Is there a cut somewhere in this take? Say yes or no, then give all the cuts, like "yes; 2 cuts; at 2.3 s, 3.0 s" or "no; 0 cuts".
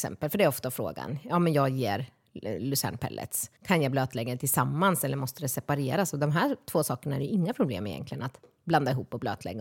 yes; 1 cut; at 3.6 s